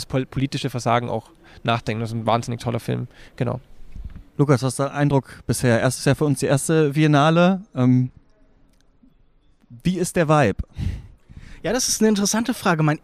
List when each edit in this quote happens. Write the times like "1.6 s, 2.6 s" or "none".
4.3 s